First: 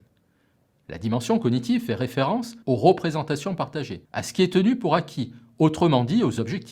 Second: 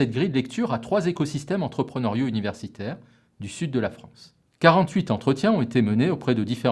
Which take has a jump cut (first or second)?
first